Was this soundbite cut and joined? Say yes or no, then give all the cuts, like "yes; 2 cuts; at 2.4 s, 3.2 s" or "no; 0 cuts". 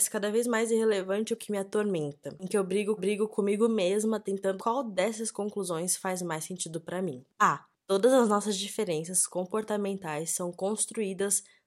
yes; 3 cuts; at 1.4 s, 3.0 s, 4.6 s